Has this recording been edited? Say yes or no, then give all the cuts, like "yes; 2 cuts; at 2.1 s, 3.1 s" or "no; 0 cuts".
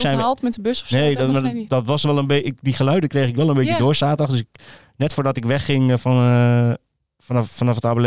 no; 0 cuts